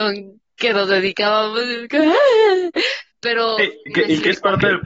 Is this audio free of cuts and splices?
no; 1 cut; at 3.1 s

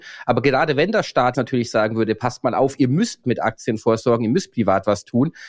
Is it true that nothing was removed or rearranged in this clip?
no; 2 cuts; at 1.3 s, 3.2 s

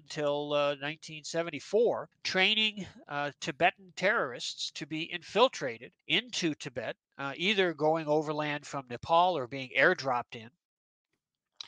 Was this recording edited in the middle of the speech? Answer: yes; 2 cuts; at 2.1 s, 6.0 s

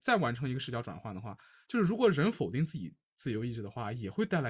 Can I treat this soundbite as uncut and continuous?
yes; 0 cuts

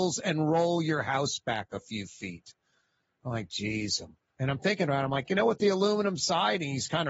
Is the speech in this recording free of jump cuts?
yes; 0 cuts

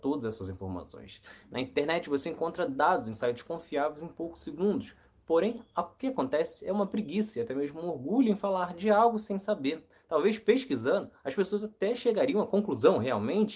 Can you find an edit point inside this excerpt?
no; 0 cuts

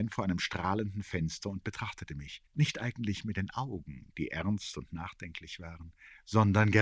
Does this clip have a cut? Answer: yes; 1 cut; at 2.5 s

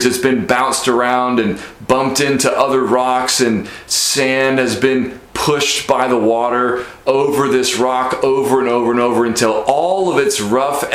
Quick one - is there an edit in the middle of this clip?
no; 0 cuts

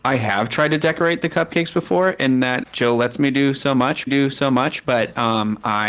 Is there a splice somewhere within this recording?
yes; 2 cuts; at 2.6 s, 4.1 s

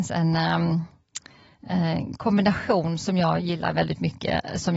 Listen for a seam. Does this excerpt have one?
no; 0 cuts

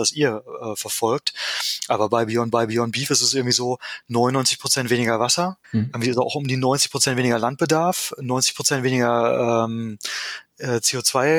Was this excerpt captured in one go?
no; 2 cuts; at 2.5 s, 5.6 s

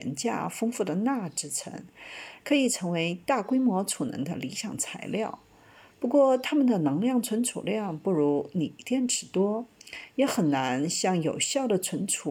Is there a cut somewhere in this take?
no; 0 cuts

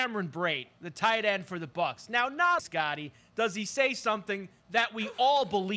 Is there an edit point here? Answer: yes; 1 cut; at 2.6 s

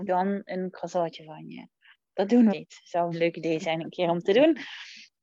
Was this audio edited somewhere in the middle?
yes; 2 cuts; at 2.5 s, 3.1 s

